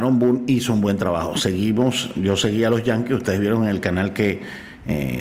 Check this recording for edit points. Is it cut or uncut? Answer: uncut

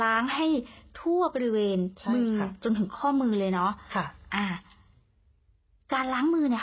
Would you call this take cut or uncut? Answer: uncut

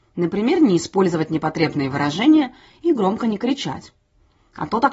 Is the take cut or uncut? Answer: uncut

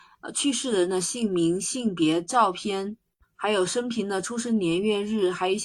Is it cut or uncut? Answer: cut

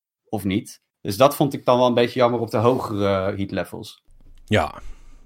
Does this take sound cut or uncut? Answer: uncut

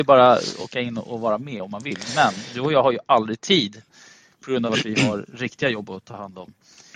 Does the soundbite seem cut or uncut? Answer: uncut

